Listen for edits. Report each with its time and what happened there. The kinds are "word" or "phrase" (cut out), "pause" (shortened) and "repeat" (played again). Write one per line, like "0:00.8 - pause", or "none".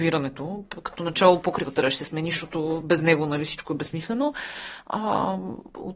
none